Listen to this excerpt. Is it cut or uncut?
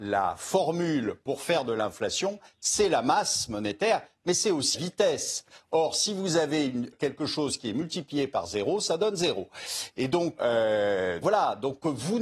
cut